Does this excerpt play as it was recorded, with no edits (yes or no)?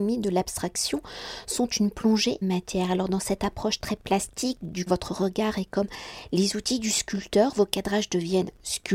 no